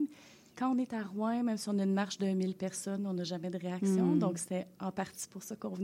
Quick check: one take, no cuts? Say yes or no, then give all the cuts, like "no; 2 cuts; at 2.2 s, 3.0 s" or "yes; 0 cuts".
yes; 0 cuts